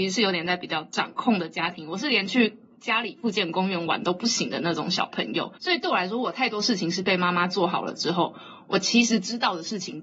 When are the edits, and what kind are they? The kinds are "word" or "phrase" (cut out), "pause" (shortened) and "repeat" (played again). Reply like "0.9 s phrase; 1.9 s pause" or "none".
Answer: 5.6 s pause